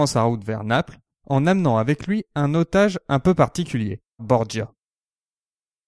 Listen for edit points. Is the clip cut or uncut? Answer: cut